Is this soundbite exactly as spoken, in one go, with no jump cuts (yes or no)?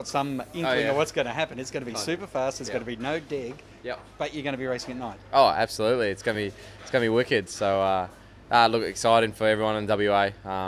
yes